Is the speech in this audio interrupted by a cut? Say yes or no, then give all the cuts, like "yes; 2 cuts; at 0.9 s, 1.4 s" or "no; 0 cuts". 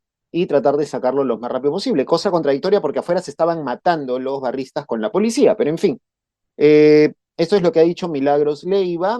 no; 0 cuts